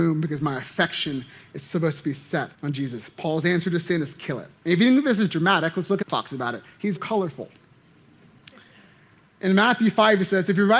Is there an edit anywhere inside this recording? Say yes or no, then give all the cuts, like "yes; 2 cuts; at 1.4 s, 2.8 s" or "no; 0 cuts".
yes; 4 cuts; at 2.5 s, 4.6 s, 6.0 s, 7.0 s